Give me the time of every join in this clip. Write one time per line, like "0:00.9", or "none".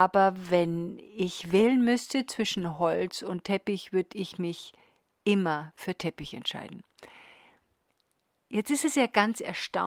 none